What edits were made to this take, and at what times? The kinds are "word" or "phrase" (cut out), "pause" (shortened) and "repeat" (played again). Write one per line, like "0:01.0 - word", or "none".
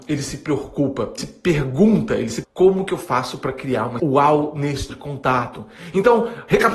0:01.2 - word
0:02.4 - word
0:04.0 - word
0:04.9 - word